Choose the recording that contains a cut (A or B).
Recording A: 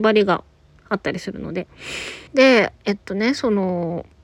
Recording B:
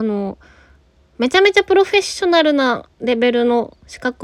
A